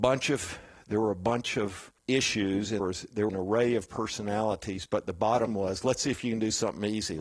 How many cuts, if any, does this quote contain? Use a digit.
4